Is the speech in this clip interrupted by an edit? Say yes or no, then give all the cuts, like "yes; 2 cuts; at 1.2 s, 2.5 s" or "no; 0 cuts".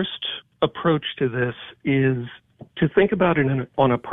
no; 0 cuts